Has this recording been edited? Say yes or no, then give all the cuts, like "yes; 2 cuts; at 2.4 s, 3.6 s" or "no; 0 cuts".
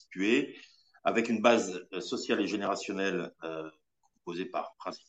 no; 0 cuts